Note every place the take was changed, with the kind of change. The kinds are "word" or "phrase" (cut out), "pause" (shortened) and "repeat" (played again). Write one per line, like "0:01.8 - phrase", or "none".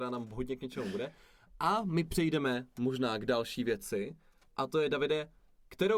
none